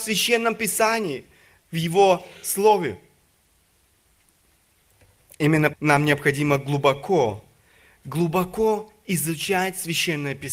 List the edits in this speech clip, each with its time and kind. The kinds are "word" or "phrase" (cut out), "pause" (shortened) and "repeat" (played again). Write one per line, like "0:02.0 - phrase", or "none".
0:05.7 - word